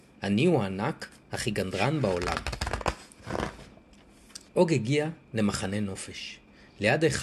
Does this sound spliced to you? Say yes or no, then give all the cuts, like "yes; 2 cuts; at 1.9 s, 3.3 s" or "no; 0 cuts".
yes; 1 cut; at 4.5 s